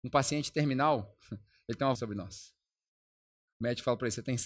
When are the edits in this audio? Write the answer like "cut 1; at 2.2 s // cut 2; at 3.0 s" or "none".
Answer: cut 1; at 2.0 s